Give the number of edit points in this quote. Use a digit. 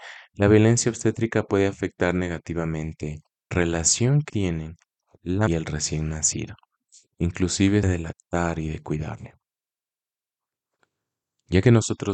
4